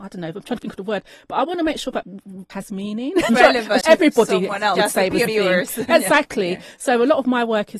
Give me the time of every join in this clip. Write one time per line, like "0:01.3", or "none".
0:02.0
0:02.5
0:03.3
0:03.8
0:04.8
0:05.3